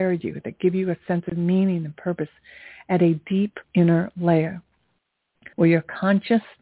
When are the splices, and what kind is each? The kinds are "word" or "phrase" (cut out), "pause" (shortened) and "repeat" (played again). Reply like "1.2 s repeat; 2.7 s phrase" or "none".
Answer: 3.6 s pause; 5.5 s pause